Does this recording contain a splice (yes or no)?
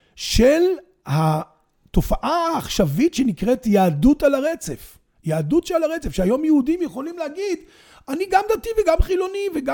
no